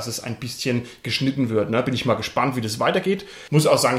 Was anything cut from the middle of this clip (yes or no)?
no